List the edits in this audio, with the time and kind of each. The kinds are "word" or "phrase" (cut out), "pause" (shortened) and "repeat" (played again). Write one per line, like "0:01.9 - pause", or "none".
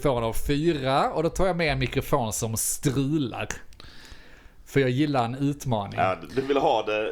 none